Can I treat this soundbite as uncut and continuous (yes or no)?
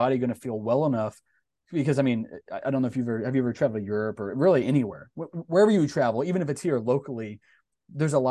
yes